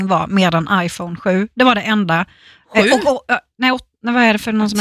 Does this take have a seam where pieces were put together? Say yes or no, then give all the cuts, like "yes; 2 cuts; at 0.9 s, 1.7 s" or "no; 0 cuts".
no; 0 cuts